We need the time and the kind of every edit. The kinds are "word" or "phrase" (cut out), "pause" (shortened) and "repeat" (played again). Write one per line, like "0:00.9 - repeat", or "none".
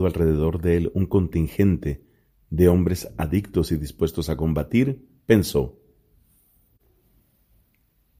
none

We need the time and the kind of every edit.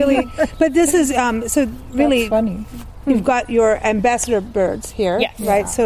none

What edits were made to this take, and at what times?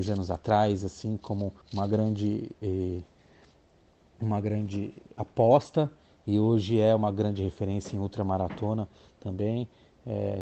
0:01.6 - pause

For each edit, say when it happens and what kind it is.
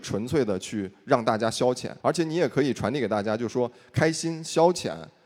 0:02.0 - pause

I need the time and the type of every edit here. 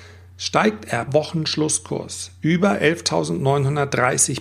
0:01.1 - word

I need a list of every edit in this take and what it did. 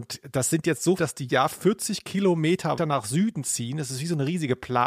0:01.0 - word
0:01.3 - word
0:02.8 - word

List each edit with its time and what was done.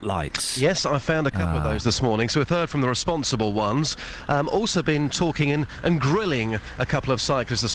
none

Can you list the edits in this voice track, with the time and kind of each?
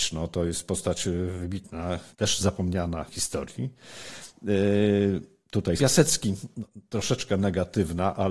0:02.1 - pause
0:03.1 - phrase
0:05.8 - word

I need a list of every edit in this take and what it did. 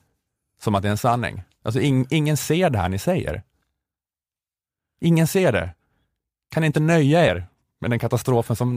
none

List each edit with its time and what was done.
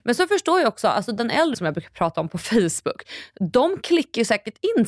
0:01.5 - word

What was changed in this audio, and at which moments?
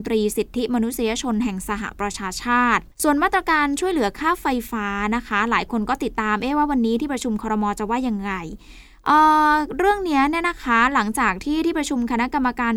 0:02.9 - pause

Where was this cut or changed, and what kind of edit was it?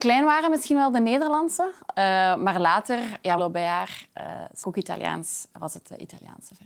0:03.4 - phrase
0:04.6 - word

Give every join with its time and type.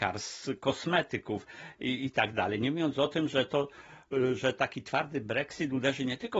none

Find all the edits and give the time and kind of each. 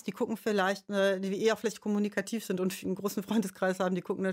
none

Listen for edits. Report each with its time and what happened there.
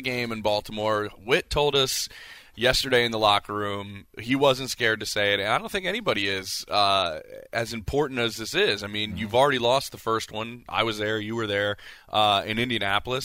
none

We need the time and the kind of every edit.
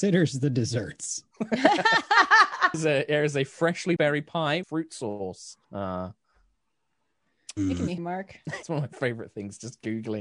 0:02.7 - word
0:04.0 - word
0:04.6 - phrase
0:05.6 - pause
0:08.0 - word
0:08.6 - word

